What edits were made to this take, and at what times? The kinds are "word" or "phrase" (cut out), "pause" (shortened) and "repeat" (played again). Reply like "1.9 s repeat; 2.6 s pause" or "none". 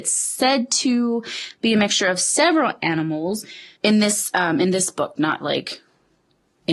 3.8 s pause